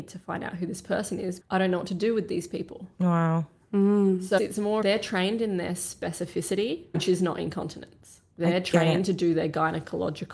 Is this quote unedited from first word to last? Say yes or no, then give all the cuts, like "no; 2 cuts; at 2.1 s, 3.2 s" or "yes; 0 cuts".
no; 5 cuts; at 1.4 s, 4.4 s, 4.8 s, 6.9 s, 8.3 s